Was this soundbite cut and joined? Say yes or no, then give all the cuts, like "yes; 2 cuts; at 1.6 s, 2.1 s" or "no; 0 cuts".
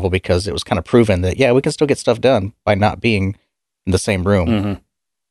no; 0 cuts